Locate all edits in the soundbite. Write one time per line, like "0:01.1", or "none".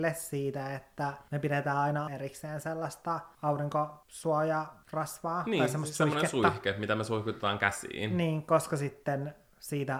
0:02.1